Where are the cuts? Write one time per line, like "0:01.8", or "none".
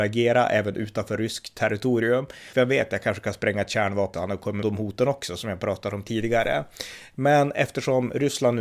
0:02.5
0:04.1
0:04.6